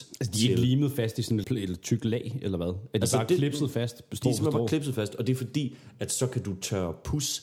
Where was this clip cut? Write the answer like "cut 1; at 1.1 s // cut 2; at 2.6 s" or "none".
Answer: cut 1; at 1.4 s